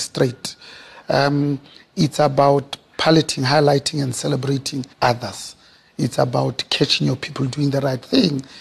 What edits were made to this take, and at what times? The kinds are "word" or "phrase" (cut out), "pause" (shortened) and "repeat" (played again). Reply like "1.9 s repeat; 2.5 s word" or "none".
4.9 s pause